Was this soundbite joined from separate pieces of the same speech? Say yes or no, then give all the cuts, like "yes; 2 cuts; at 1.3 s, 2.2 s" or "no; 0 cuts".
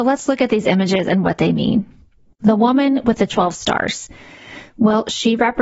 no; 0 cuts